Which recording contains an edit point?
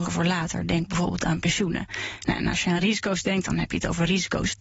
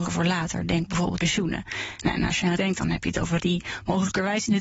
second; 3 cuts; at 1.2 s, 2.6 s, 3.4 s

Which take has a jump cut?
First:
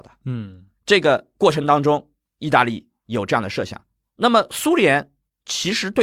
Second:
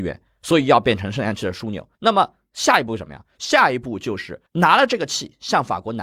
second; 2 cuts; at 1.9 s, 4.5 s

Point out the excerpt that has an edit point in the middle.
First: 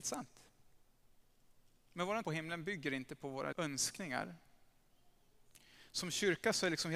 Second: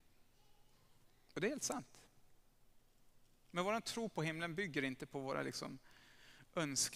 first; 2 cuts; at 2.2 s, 3.5 s

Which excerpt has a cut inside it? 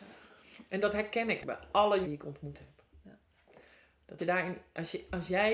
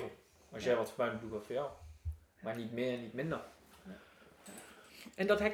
first; 3 cuts; at 1.4 s, 2.0 s, 4.2 s

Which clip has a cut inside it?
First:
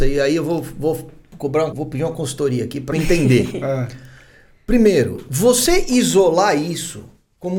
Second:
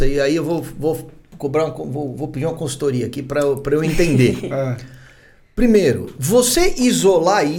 first; 2 cuts; at 1.7 s, 2.9 s

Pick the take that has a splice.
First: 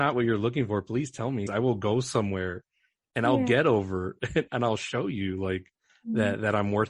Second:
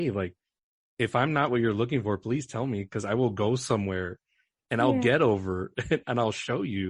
first; 1 cut; at 1.5 s

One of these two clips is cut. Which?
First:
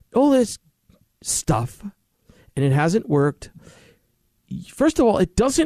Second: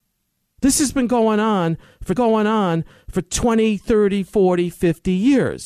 second; 1 cut; at 2.2 s

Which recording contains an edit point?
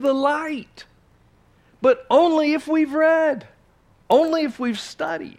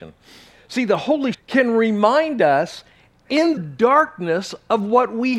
second; 2 cuts; at 1.3 s, 3.6 s

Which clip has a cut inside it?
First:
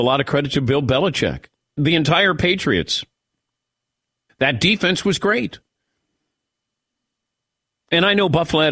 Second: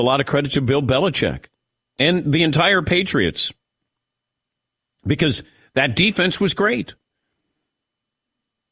first; 2 cuts; at 1.8 s, 4.3 s

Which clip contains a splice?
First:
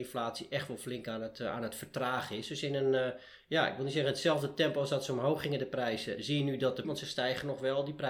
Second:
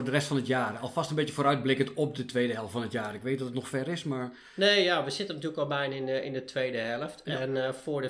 first; 1 cut; at 6.8 s

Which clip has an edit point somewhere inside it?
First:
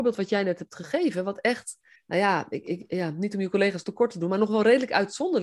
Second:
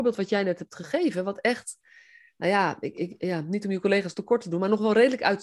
first; 1 cut; at 2.0 s

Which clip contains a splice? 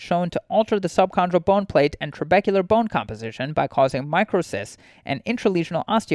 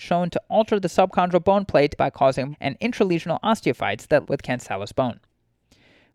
second; 3 cuts; at 2.0 s, 2.5 s, 4.2 s

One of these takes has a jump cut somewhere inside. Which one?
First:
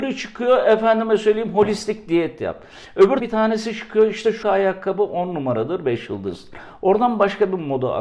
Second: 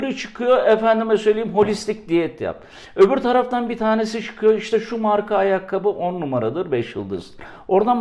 first; 2 cuts; at 3.2 s, 4.4 s

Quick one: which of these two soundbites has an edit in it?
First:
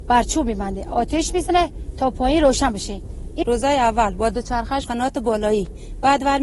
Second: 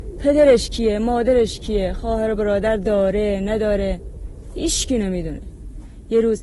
first; 2 cuts; at 3.4 s, 4.8 s

